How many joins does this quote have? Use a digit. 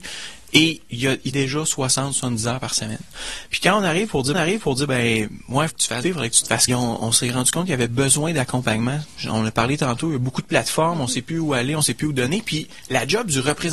5